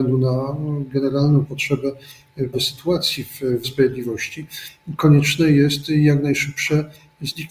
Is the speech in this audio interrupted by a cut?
yes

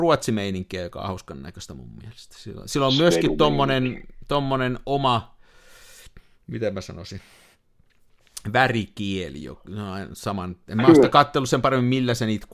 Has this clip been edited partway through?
no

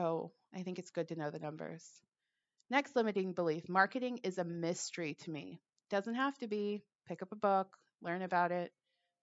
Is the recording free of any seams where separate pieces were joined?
yes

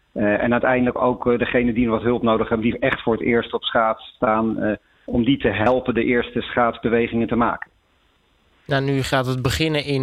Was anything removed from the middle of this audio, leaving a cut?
no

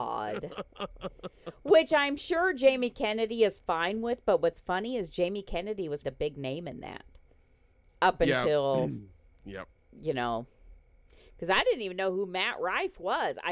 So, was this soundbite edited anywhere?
yes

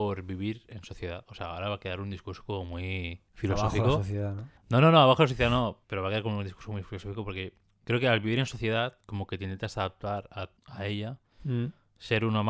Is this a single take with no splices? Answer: no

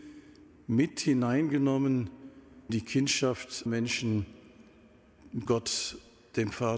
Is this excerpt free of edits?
no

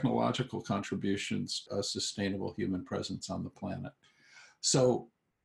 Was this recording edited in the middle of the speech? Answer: yes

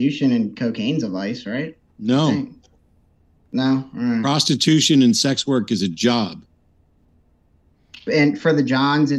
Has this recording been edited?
no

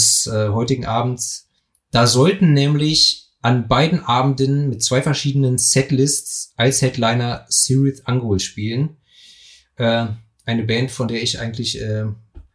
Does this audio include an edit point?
no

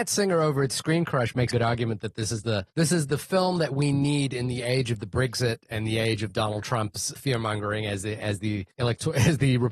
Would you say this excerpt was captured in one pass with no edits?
no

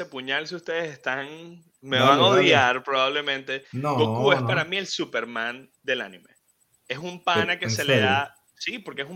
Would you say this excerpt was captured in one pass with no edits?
yes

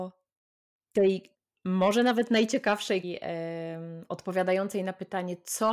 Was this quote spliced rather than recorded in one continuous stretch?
yes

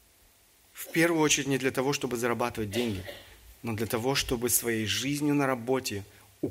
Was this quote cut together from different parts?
no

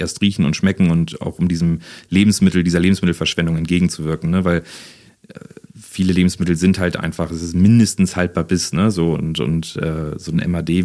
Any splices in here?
yes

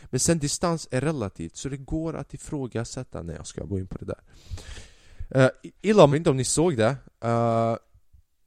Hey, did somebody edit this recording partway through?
yes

